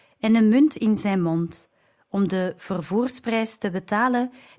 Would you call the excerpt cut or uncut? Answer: uncut